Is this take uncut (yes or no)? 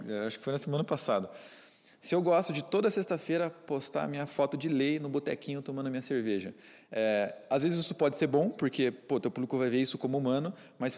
yes